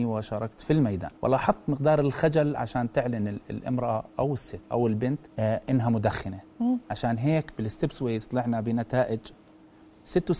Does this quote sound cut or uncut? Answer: cut